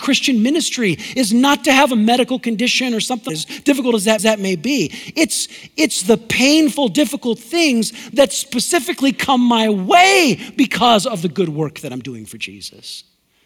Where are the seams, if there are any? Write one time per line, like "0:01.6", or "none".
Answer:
0:03.3
0:04.2